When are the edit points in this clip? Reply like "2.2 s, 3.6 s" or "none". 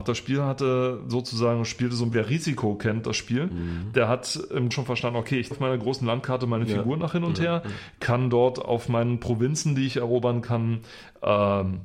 2.1 s, 4.7 s, 5.5 s